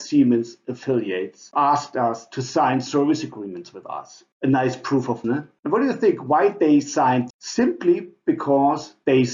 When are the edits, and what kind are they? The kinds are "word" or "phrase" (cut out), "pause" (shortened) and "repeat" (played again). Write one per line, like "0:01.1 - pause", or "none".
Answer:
0:01.5 - word
0:05.2 - phrase
0:07.3 - phrase